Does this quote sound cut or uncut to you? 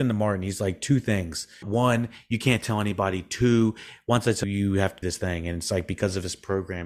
cut